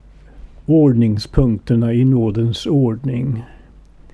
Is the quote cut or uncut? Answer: uncut